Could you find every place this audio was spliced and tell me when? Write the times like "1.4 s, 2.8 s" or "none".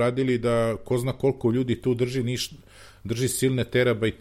none